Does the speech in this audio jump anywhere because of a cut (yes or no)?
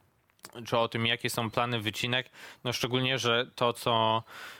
no